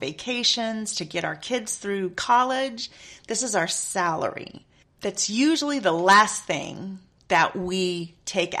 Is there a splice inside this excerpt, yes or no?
no